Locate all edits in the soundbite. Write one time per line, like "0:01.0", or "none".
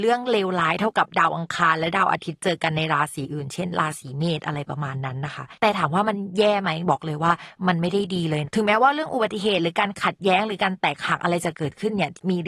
0:05.6